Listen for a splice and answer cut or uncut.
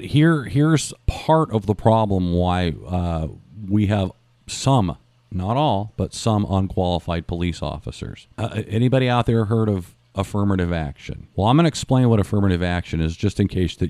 cut